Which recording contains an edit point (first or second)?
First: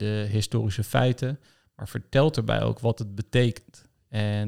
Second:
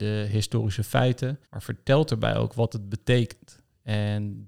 second